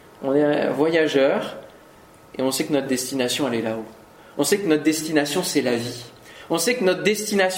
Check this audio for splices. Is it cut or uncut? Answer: uncut